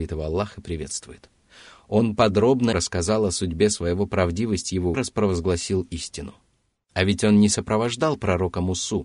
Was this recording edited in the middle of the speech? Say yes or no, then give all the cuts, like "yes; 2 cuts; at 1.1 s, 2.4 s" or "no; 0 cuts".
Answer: yes; 3 cuts; at 2.7 s, 4.1 s, 4.9 s